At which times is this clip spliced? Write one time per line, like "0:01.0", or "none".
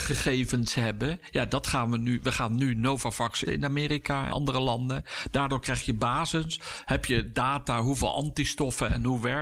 0:03.5
0:04.3